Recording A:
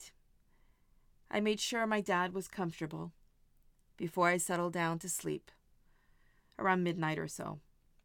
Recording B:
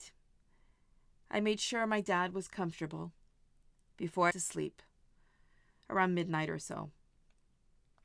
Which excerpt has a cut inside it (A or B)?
B